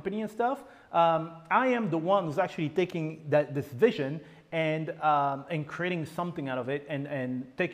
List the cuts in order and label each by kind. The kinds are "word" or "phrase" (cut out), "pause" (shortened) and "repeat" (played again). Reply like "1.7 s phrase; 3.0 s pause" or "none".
none